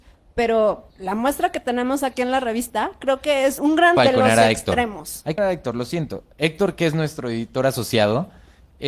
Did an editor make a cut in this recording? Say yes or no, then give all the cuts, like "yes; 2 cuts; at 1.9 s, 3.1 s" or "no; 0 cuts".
yes; 5 cuts; at 0.9 s, 3.6 s, 4.0 s, 5.4 s, 6.3 s